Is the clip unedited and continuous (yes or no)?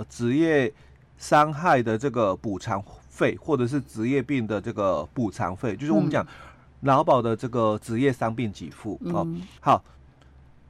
no